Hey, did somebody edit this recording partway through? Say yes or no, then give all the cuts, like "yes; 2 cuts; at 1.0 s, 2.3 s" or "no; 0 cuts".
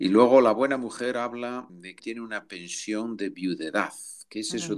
yes; 2 cuts; at 1.7 s, 2.0 s